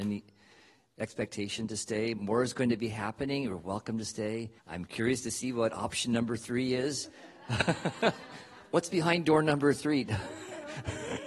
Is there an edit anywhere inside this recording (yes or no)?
yes